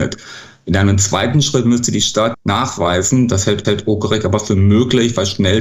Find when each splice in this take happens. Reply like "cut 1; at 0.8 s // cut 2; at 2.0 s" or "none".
cut 1; at 2.3 s // cut 2; at 3.6 s